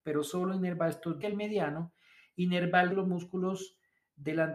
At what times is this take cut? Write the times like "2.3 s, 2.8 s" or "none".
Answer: 1.2 s, 2.9 s

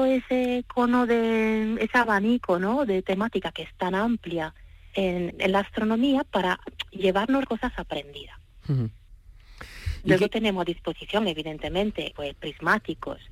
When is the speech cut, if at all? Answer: 5.3 s, 7.4 s, 12.1 s

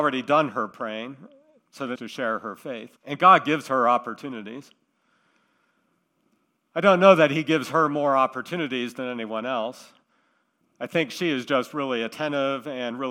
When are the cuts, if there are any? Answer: 2.0 s, 3.0 s

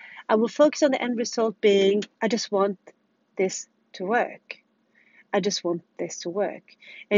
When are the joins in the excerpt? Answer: 2.1 s

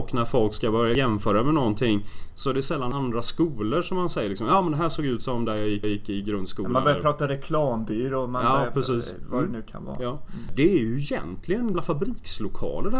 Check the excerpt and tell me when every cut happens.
5.8 s, 11.7 s

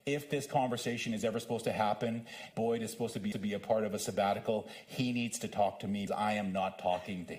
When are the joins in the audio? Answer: 2.5 s, 3.3 s, 6.1 s

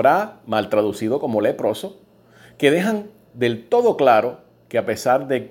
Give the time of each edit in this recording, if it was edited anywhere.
none

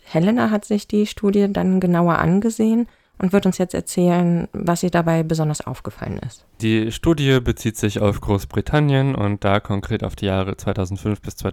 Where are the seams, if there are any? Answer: 6.5 s

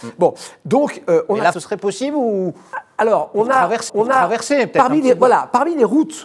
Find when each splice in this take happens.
1.5 s, 3.9 s

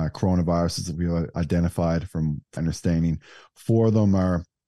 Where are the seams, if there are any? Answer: 1.3 s, 2.6 s

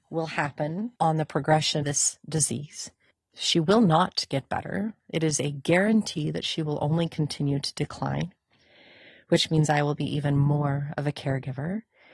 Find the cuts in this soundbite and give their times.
1.0 s, 1.8 s, 3.1 s

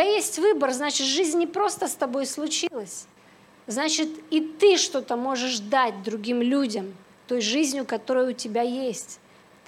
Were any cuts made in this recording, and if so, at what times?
none

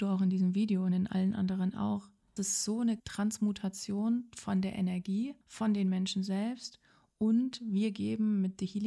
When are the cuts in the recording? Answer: 2.4 s, 3.0 s, 5.4 s

